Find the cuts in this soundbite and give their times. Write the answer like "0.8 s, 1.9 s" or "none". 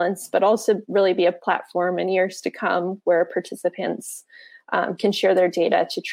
none